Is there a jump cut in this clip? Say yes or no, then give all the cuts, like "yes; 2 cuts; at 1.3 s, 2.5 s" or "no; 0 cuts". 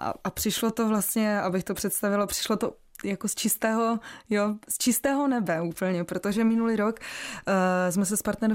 no; 0 cuts